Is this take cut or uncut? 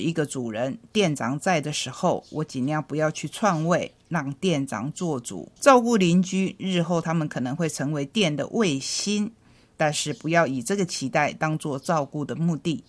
cut